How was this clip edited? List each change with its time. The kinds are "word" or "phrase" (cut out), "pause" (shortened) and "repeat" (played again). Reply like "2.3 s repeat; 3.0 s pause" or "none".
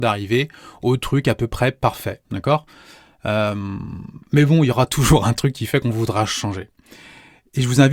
2.2 s pause; 4.2 s pause